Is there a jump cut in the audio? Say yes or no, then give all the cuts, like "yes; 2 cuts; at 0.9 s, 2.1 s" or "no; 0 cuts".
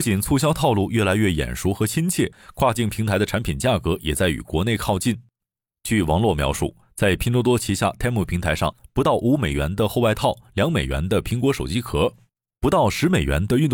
no; 0 cuts